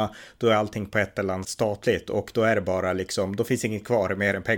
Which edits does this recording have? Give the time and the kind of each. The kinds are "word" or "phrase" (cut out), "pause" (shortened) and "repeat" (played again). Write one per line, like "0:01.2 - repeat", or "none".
0:01.4 - word